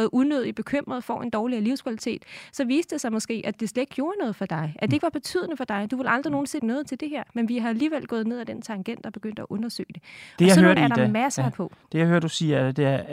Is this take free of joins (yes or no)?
no